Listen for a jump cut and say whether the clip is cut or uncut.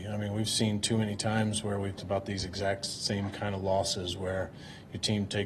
cut